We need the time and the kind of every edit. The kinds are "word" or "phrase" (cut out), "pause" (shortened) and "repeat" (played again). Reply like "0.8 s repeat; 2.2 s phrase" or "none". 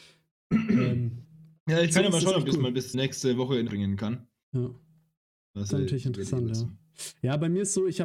2.9 s word; 3.7 s word; 5.7 s word